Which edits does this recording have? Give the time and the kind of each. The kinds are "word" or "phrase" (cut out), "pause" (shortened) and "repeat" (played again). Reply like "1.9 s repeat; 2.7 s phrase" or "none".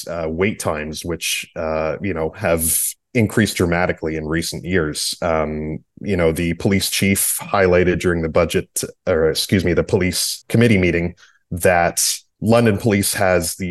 none